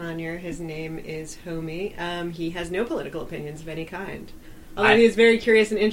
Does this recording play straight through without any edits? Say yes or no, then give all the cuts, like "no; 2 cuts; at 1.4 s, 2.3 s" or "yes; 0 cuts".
yes; 0 cuts